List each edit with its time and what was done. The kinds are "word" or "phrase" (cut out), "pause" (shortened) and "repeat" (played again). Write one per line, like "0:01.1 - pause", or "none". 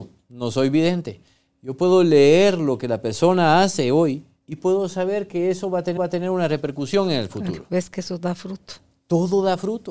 0:06.0 - repeat